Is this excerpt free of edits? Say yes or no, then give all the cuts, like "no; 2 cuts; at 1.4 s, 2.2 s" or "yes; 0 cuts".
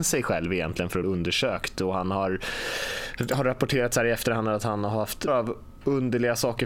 no; 2 cuts; at 1.0 s, 5.3 s